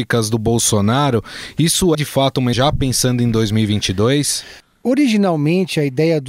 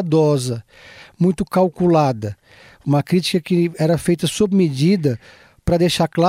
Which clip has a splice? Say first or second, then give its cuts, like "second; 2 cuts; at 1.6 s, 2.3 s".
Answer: first; 2 cuts; at 1.9 s, 2.5 s